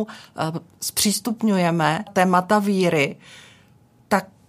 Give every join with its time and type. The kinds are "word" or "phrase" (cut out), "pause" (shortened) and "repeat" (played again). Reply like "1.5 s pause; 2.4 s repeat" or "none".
2.1 s word